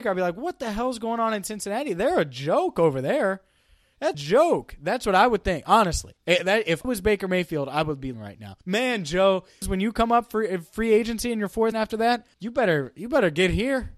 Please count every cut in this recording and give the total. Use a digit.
8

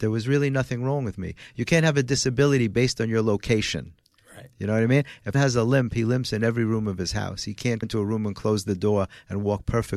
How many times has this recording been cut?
2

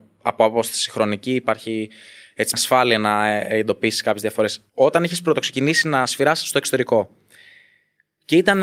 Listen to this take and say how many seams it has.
2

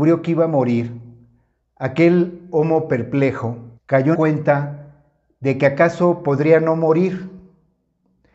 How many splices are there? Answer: 2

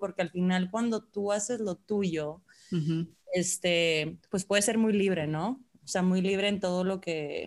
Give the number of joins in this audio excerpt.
0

